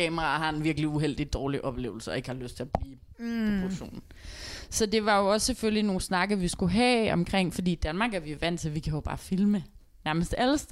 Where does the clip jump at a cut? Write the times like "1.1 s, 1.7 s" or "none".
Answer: none